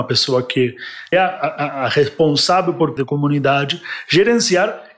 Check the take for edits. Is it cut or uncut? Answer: cut